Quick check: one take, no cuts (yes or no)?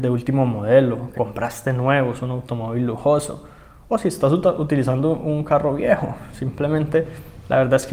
no